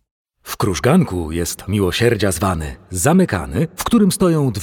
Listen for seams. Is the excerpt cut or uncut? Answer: cut